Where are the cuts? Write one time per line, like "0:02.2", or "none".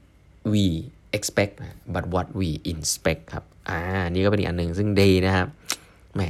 none